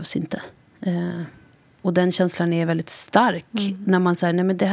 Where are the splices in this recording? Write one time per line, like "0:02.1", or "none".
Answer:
none